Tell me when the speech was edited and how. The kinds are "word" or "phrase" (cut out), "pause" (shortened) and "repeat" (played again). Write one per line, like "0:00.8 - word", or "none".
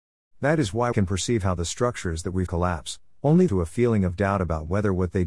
0:00.9 - word
0:02.5 - phrase
0:03.5 - phrase